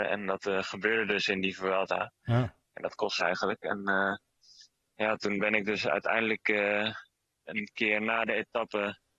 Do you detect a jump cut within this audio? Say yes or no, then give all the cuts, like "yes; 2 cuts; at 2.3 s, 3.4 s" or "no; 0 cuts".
yes; 1 cut; at 3.2 s